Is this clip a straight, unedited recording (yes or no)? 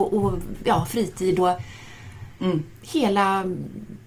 no